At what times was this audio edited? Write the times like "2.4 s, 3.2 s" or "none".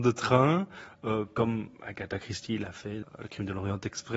3.0 s